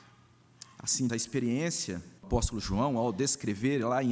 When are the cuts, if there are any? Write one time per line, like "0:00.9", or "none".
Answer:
0:01.1
0:02.2